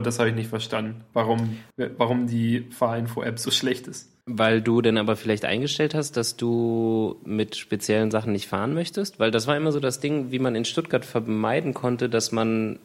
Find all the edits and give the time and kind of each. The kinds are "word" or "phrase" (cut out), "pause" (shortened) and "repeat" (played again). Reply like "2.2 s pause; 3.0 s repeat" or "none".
1.7 s pause; 4.2 s pause

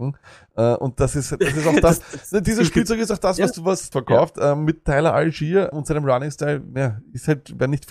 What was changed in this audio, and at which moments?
3.9 s word; 5.7 s word

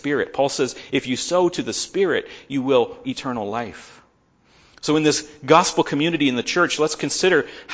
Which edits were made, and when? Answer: 3.0 s word

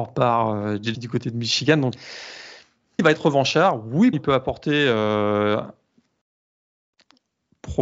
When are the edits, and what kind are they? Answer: 0.9 s word; 3.0 s word; 4.1 s word

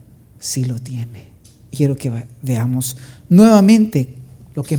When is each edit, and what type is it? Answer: 1.7 s word

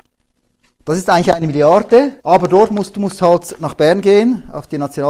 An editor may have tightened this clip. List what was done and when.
2.2 s pause

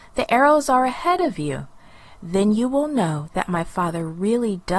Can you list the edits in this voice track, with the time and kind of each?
none

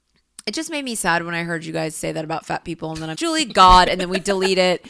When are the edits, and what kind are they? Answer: 3.1 s word

